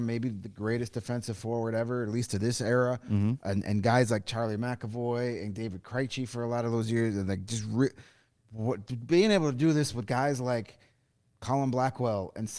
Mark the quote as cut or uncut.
uncut